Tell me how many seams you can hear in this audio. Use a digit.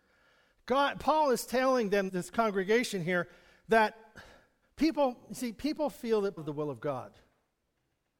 3